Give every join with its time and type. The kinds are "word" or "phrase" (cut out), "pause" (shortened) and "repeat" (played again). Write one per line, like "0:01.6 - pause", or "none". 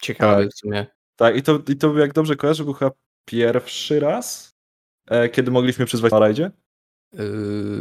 0:06.1 - word